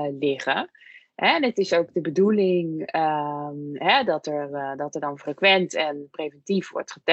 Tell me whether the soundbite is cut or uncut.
uncut